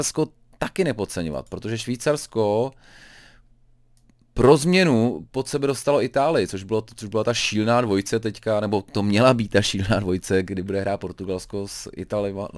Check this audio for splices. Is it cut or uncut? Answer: uncut